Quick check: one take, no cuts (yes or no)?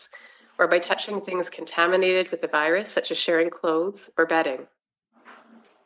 yes